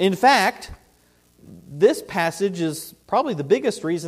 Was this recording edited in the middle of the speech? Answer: yes; 2 cuts; at 1.6 s, 3.0 s

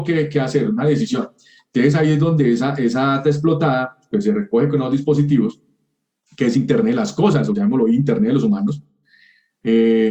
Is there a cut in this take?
no; 0 cuts

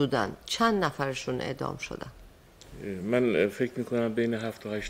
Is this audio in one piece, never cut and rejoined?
yes; 0 cuts

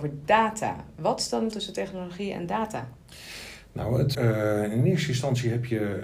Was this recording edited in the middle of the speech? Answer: yes; 2 cuts; at 1.5 s, 4.1 s

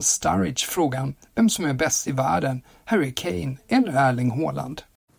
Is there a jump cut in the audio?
no; 0 cuts

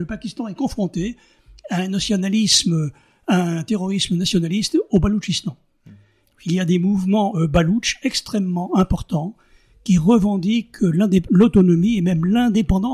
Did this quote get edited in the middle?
no; 0 cuts

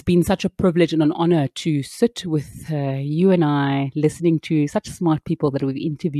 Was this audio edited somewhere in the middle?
no; 0 cuts

